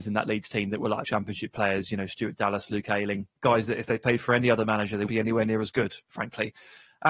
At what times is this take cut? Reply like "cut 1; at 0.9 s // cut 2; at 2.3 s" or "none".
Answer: cut 1; at 1.0 s // cut 2; at 3.4 s // cut 3; at 5.1 s